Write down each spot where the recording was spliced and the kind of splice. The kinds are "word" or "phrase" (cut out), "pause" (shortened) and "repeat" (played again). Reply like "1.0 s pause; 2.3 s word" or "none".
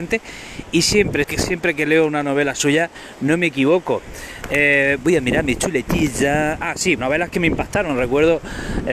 1.2 s word; 7.0 s word